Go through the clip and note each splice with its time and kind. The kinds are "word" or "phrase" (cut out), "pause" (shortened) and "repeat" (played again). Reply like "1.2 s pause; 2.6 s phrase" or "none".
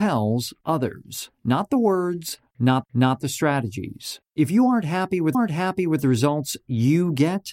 1.3 s pause; 2.8 s repeat; 4.3 s pause; 5.3 s repeat